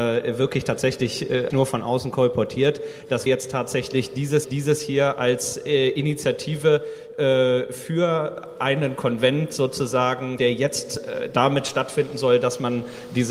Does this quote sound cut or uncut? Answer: cut